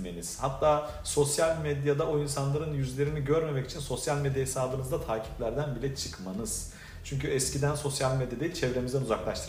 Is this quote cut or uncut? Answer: uncut